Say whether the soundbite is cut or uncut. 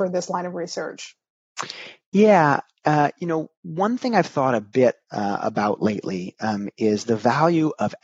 uncut